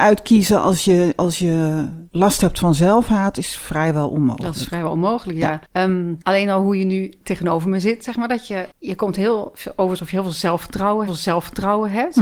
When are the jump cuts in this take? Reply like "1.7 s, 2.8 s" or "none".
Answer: 2.1 s, 5.6 s, 6.2 s, 8.7 s, 11.1 s